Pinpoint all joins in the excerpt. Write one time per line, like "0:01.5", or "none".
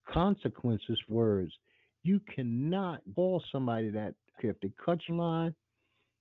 0:01.1
0:03.2
0:04.4
0:05.1